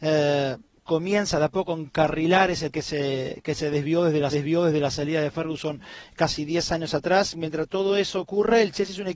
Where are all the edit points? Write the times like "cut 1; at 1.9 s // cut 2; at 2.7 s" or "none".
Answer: cut 1; at 2.7 s // cut 2; at 4.3 s